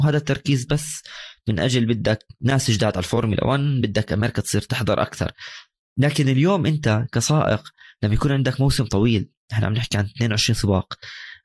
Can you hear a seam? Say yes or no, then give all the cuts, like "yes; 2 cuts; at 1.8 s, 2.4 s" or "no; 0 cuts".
no; 0 cuts